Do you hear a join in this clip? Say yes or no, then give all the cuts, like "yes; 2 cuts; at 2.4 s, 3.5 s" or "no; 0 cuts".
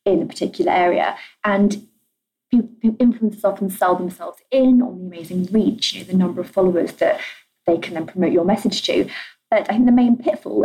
no; 0 cuts